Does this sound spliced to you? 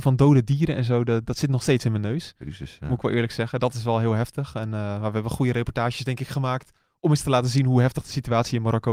no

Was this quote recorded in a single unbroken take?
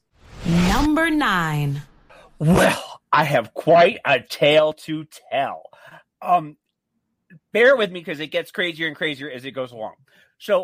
yes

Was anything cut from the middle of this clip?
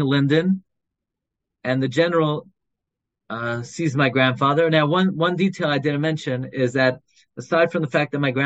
no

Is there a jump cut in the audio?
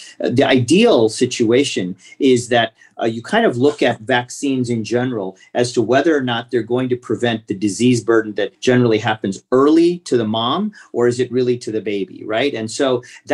yes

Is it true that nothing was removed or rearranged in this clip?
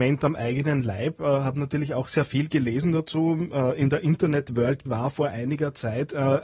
no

